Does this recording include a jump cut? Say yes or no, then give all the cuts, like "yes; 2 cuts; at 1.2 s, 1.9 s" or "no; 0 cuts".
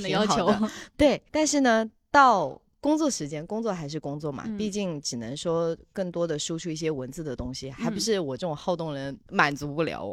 yes; 1 cut; at 1.3 s